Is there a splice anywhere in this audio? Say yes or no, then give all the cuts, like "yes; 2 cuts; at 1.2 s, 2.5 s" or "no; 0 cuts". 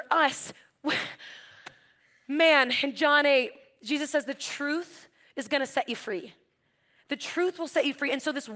no; 0 cuts